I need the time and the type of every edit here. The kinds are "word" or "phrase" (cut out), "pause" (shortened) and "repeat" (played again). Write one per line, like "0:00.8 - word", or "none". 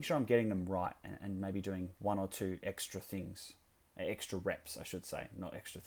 0:02.0 - pause